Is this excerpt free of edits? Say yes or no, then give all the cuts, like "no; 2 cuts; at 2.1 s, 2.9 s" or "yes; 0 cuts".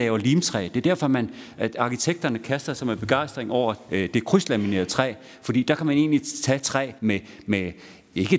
no; 1 cut; at 7.0 s